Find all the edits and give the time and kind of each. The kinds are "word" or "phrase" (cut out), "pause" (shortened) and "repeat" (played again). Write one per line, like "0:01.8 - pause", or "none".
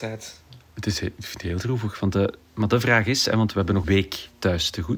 0:03.8 - word